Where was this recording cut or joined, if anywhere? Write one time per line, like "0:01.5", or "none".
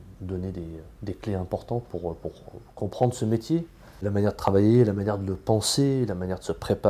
none